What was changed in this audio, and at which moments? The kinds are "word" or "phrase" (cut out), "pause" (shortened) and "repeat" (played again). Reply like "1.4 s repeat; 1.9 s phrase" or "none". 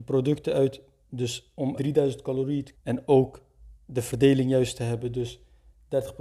1.8 s phrase; 2.7 s word